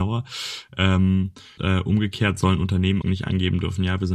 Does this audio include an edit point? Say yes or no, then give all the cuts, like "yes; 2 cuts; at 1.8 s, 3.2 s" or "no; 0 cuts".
yes; 2 cuts; at 1.6 s, 3.0 s